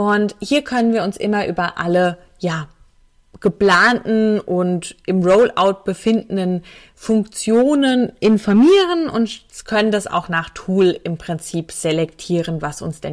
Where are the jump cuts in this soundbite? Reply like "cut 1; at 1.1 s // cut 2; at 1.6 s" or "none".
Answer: none